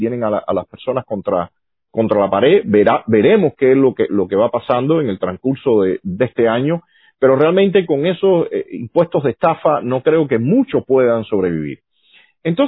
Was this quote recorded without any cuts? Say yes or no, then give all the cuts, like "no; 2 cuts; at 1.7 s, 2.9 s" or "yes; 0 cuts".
yes; 0 cuts